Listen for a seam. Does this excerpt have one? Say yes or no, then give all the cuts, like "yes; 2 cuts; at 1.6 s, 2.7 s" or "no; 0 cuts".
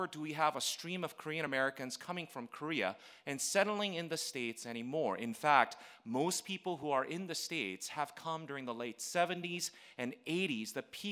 no; 0 cuts